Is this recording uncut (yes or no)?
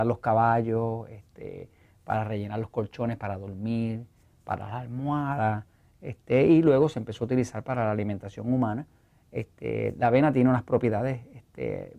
yes